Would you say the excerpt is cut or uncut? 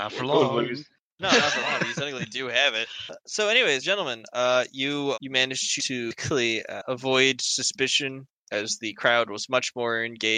cut